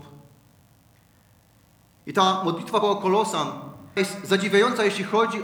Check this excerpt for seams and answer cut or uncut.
cut